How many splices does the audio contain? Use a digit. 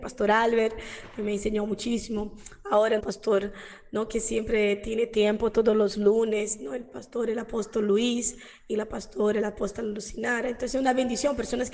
1